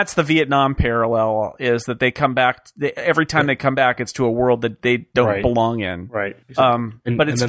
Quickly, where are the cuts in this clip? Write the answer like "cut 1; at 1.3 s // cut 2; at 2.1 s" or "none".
cut 1; at 6.4 s